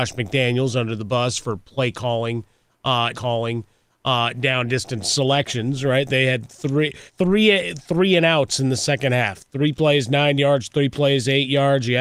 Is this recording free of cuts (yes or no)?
no